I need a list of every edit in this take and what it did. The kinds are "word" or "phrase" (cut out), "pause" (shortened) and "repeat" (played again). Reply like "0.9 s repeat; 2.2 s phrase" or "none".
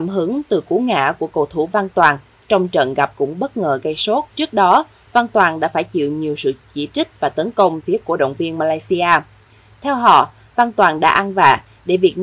3.1 s word; 4.3 s pause; 7.8 s word